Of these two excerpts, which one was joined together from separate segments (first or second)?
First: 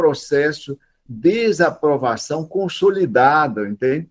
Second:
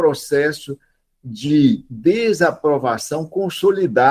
first